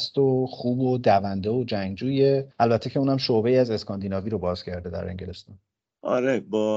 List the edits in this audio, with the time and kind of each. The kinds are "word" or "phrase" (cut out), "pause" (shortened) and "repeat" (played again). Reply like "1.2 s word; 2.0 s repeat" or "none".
none